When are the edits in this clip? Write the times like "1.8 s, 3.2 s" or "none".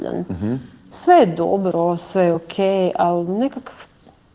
none